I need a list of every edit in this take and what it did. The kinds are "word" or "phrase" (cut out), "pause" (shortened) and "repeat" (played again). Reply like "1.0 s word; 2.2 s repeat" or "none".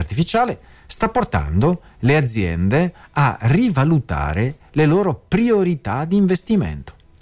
none